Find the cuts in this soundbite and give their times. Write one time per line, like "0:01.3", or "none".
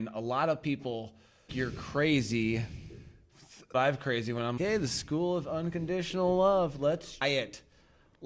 0:01.5
0:03.7
0:04.6
0:07.2

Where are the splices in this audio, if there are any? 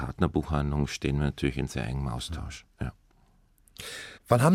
none

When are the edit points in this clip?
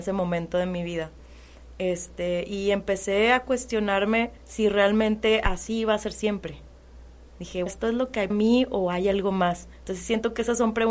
0:04.4
0:07.7
0:08.3
0:09.7

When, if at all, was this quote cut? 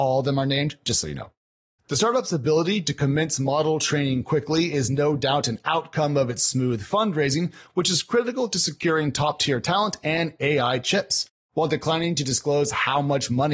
none

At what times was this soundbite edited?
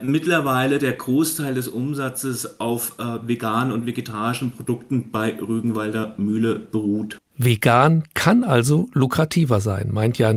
none

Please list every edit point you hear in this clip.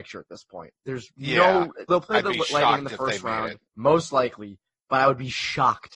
0:01.9
0:03.6

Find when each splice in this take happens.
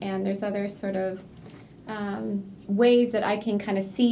none

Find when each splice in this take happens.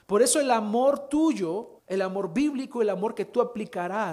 0:01.8

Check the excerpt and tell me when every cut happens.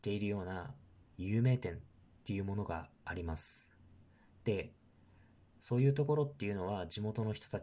none

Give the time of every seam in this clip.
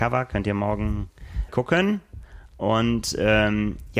0:01.5

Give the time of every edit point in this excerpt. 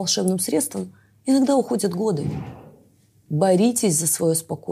none

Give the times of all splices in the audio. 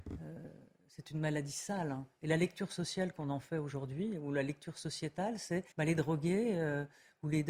0:05.7

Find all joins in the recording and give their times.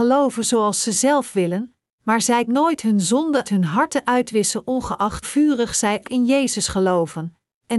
0:02.5
0:03.4
0:05.2
0:06.0

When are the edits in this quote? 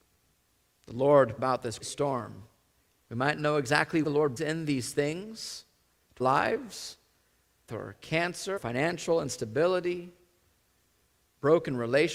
0:01.4
0:01.8
0:03.4
0:04.0
0:04.4
0:06.2
0:07.7
0:08.6

